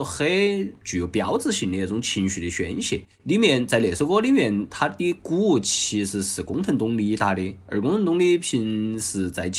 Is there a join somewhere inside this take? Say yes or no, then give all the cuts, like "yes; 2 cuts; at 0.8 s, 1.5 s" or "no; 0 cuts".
yes; 1 cut; at 3.1 s